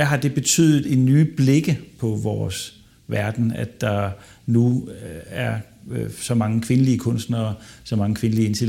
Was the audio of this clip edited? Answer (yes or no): no